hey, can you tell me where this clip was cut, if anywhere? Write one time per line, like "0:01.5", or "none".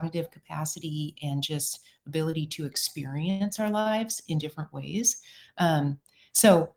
none